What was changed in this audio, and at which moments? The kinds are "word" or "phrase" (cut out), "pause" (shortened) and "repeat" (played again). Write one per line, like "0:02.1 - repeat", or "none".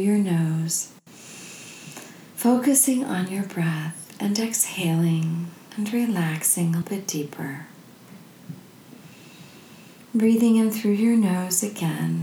0:06.8 - word